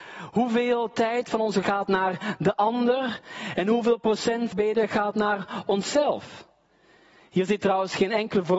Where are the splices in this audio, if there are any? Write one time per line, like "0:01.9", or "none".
0:01.6
0:04.5